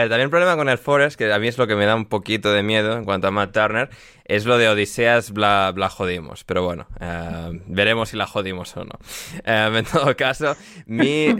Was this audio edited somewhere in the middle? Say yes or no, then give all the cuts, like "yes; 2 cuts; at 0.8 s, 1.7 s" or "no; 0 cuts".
no; 0 cuts